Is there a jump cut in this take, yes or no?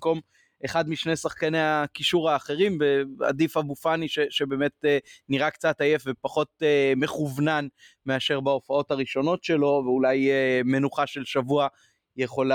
no